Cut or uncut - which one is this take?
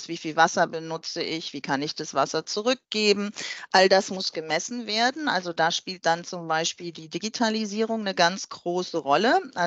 uncut